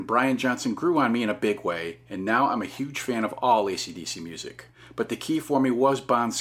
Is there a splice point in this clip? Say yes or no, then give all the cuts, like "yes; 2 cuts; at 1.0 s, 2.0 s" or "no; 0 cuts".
no; 0 cuts